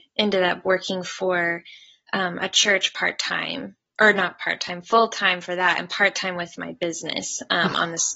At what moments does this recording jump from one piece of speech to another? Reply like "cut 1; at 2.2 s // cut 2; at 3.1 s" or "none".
none